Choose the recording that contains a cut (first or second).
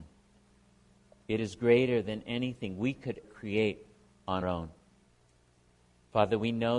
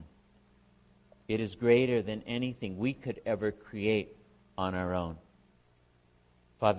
first